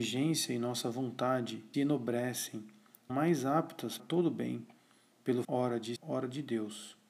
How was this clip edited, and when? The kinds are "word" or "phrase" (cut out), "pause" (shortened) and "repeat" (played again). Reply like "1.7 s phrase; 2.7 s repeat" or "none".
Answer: 1.7 s word; 3.1 s phrase; 4.0 s word; 5.4 s phrase; 6.0 s word